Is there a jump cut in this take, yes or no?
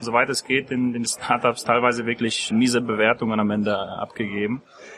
yes